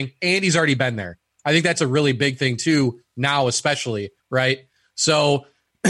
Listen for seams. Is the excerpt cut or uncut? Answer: cut